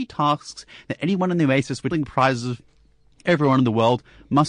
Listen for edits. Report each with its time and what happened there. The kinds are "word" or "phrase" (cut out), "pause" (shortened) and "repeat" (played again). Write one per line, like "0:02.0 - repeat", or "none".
0:01.9 - word